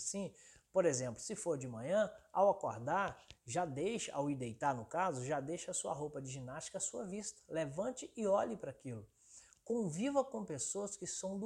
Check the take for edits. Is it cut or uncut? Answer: uncut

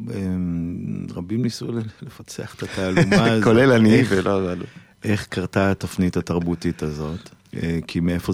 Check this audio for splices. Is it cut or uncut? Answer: cut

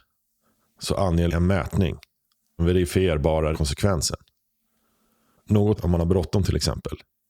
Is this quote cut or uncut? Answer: cut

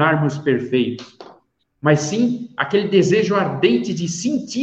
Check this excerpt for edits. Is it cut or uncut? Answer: uncut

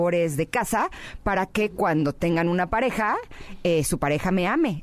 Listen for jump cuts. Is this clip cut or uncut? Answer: uncut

